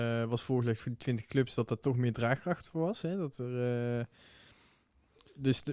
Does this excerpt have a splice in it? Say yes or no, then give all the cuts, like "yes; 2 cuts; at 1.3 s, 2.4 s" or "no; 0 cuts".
no; 0 cuts